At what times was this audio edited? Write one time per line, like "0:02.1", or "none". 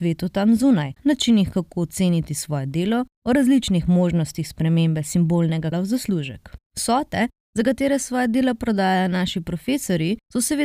0:01.0
0:05.7
0:06.7